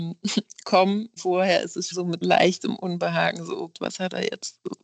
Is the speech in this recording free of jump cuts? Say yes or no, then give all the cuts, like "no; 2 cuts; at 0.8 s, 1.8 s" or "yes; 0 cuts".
no; 4 cuts; at 1.2 s, 1.9 s, 2.2 s, 3.7 s